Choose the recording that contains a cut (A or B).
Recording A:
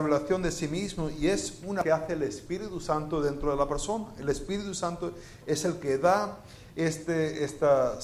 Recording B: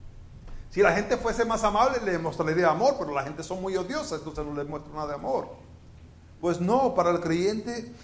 A